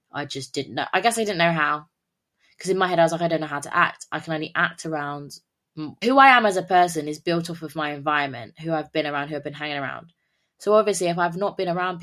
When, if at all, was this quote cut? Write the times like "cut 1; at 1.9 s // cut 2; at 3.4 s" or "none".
cut 1; at 6.0 s